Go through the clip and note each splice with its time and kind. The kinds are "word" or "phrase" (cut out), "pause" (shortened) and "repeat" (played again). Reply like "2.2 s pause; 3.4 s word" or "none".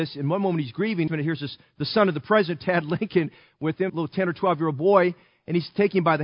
1.1 s word; 3.9 s word